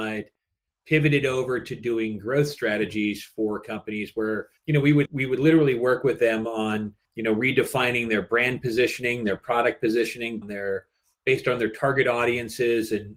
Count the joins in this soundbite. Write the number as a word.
four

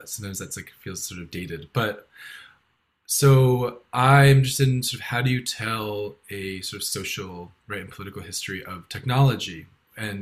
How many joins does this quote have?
zero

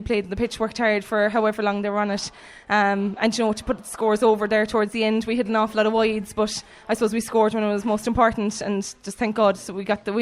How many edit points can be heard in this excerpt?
zero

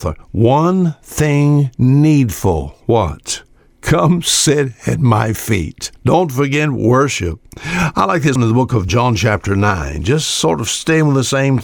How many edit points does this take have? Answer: four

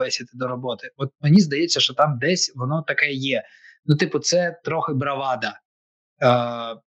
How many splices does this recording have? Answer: zero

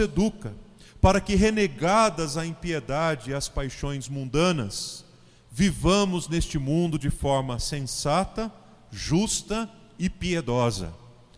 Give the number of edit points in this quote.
zero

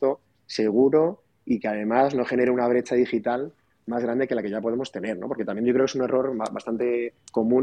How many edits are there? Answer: zero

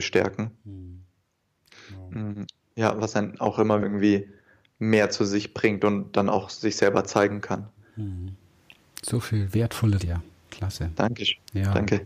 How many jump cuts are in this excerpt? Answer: two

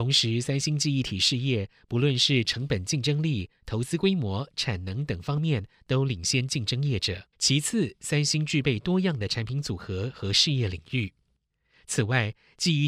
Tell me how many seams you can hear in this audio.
one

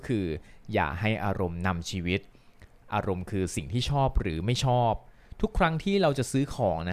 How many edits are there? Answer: zero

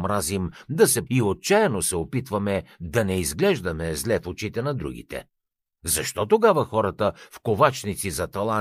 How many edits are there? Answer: one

